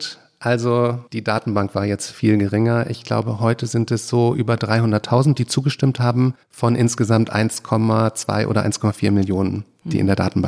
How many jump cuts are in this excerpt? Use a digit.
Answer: 2